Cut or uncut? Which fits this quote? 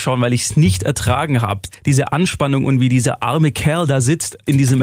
cut